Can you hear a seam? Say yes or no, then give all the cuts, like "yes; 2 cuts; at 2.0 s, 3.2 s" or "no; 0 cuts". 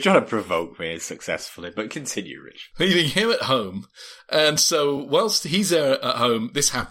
no; 0 cuts